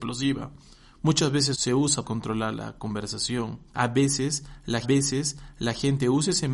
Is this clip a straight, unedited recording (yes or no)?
no